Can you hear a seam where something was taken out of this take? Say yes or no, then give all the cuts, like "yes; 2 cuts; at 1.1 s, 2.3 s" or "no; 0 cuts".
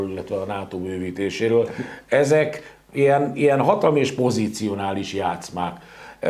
no; 0 cuts